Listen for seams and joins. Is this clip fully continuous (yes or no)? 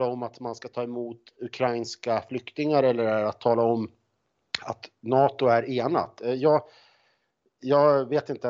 yes